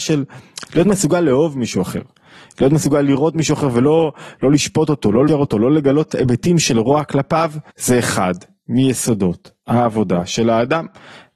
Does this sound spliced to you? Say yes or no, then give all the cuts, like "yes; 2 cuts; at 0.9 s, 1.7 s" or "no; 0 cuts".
yes; 2 cuts; at 5.3 s, 7.7 s